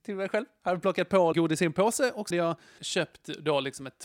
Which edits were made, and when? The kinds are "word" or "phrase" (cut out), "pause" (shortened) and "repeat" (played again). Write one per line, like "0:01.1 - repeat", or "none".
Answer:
0:01.3 - word
0:02.3 - word
0:02.8 - word